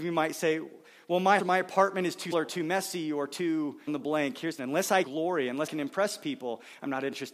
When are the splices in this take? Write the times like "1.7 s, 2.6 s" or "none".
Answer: 1.4 s, 2.3 s, 3.9 s, 4.6 s, 5.0 s, 5.7 s